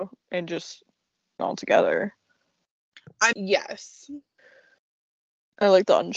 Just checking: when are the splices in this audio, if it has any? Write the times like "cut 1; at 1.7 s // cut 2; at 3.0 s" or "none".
cut 1; at 1.4 s // cut 2; at 3.3 s

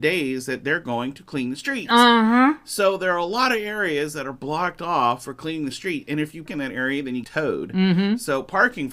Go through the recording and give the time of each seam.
cut 1; at 6.5 s // cut 2; at 7.2 s

